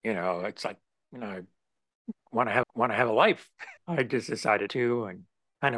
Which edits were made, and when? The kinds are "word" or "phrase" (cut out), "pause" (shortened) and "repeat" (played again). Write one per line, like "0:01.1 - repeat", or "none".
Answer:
0:02.6 - repeat
0:03.8 - word
0:04.7 - word